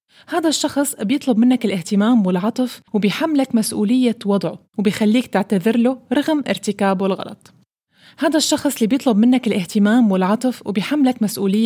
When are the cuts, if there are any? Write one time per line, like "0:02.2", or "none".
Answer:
0:02.9